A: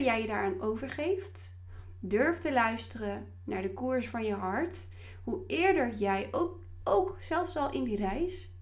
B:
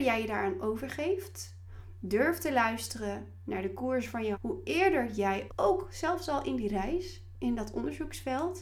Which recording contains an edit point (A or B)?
B